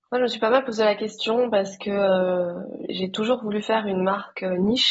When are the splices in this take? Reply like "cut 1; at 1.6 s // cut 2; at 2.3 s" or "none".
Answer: cut 1; at 2.9 s